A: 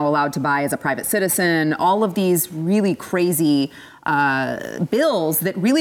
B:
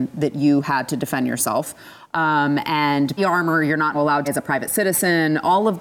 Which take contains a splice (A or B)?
B